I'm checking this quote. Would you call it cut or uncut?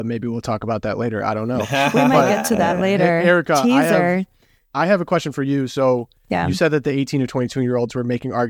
uncut